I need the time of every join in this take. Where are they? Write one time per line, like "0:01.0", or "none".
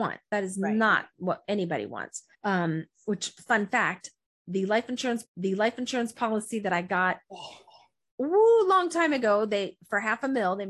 0:02.3
0:05.2